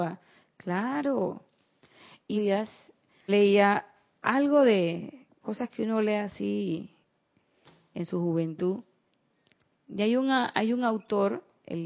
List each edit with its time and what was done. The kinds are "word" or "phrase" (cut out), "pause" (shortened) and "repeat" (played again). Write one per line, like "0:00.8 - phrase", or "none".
0:02.3 - phrase
0:03.3 - word
0:05.4 - word